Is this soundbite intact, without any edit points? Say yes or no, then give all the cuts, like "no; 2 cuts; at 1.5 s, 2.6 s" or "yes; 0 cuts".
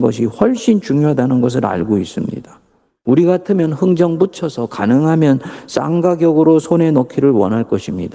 yes; 0 cuts